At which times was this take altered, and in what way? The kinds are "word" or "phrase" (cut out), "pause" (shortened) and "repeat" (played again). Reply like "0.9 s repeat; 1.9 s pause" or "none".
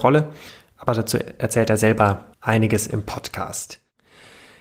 2.3 s pause